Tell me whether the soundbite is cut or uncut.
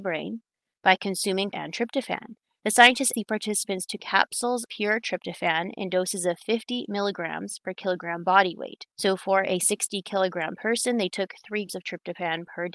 cut